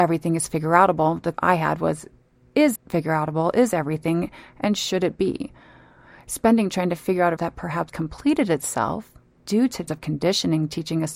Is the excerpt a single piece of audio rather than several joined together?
no; 7 cuts; at 1.3 s, 2.8 s, 6.7 s, 7.4 s, 7.9 s, 9.3 s, 9.9 s

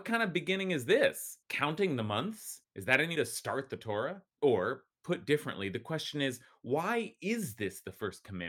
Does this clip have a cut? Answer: yes; 4 cuts; at 1.4 s, 2.6 s, 3.2 s, 4.3 s

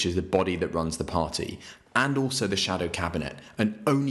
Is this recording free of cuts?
yes; 0 cuts

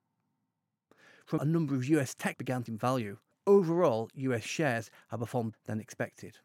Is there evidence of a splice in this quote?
yes; 5 cuts; at 1.4 s, 2.3 s, 2.7 s, 3.3 s, 5.5 s

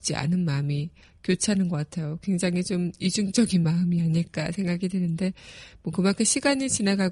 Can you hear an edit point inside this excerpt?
no; 0 cuts

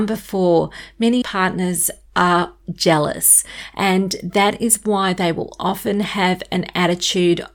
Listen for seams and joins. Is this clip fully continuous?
no; 2 cuts; at 1.2 s, 2.6 s

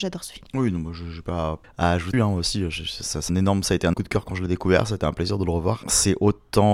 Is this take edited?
yes; 4 cuts; at 1.6 s, 2.1 s, 3.3 s, 3.9 s

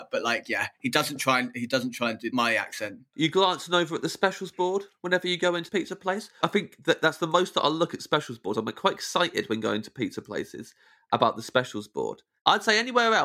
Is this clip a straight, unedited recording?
no; 1 cut; at 5.7 s

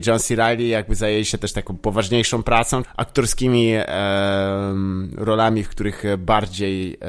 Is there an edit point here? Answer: yes; 1 cut; at 2.8 s

